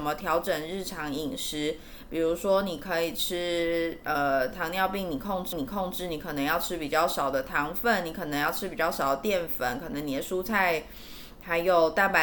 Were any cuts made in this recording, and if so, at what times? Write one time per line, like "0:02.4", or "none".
0:05.5

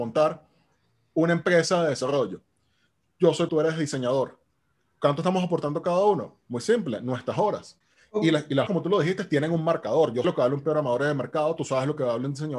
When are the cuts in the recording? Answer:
0:03.5
0:08.7
0:10.2

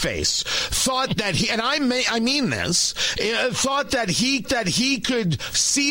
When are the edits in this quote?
0:04.4

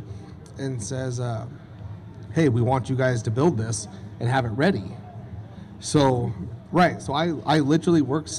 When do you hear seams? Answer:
none

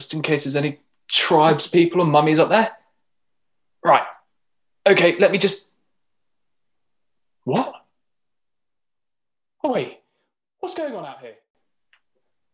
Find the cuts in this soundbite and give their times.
none

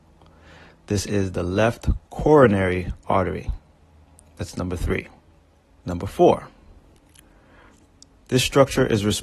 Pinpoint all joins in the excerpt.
0:05.4

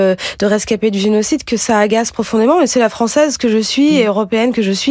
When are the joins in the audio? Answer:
none

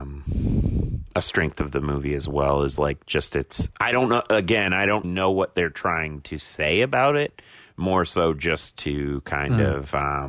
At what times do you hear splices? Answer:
0:05.0

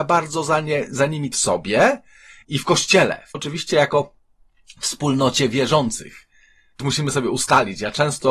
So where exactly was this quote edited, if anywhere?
0:01.3
0:02.4
0:03.3
0:06.8

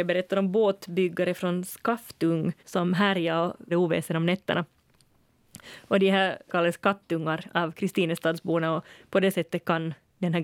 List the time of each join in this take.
0:02.6
0:03.7
0:06.5

